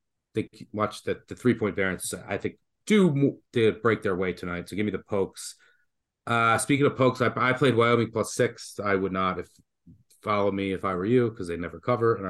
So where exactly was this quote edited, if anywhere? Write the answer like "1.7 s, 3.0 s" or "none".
none